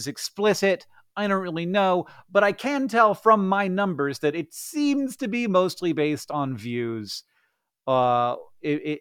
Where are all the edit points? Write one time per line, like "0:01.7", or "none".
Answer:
none